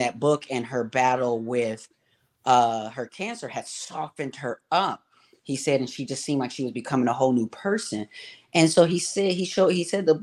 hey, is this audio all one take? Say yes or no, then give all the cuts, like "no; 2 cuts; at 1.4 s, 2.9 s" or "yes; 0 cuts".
yes; 0 cuts